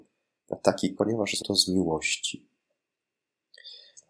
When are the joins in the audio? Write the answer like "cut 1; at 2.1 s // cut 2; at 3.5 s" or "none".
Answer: cut 1; at 1.0 s // cut 2; at 1.4 s